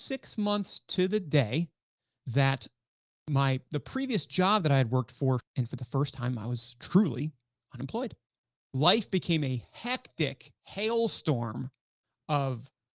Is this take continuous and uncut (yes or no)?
no